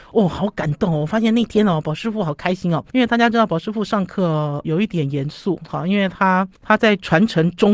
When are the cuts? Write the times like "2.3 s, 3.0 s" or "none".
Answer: 2.9 s, 4.6 s, 6.5 s